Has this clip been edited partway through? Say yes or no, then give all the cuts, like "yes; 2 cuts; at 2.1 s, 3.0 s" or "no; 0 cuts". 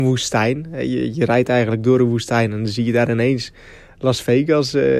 no; 0 cuts